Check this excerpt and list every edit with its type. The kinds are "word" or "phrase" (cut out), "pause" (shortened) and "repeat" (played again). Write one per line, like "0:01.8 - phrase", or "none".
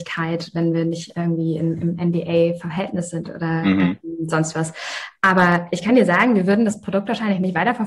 none